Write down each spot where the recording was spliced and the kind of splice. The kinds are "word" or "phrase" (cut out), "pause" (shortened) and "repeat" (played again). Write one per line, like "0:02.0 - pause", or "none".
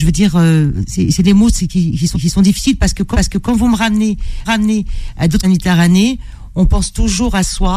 0:02.1 - repeat
0:03.1 - repeat
0:04.4 - repeat
0:05.4 - phrase